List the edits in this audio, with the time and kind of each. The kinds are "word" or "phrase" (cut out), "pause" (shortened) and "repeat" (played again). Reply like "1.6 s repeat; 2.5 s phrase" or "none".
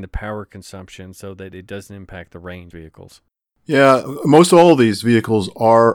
2.7 s phrase